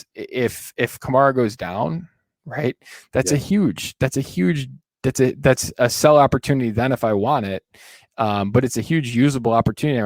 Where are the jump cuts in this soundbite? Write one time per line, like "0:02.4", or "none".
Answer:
none